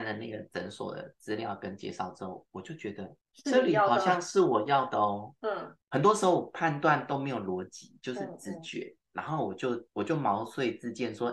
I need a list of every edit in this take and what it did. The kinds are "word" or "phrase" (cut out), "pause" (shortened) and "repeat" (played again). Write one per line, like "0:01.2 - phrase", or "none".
0:03.2 - pause
0:05.8 - pause
0:09.9 - pause